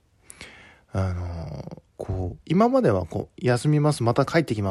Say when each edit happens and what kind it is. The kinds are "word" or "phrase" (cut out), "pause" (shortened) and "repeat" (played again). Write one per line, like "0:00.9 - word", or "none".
0:01.9 - pause
0:02.4 - pause